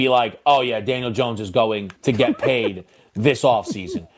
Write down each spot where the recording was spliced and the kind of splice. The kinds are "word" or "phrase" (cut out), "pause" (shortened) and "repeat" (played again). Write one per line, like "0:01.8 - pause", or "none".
0:02.0 - pause